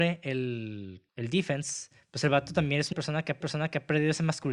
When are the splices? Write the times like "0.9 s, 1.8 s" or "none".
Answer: 1.1 s, 2.9 s, 3.4 s